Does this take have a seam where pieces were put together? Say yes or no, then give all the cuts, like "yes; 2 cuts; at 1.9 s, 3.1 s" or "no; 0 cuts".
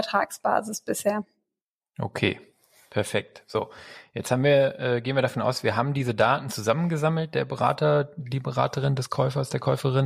no; 0 cuts